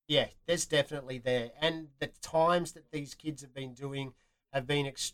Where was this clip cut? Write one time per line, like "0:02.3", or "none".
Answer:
none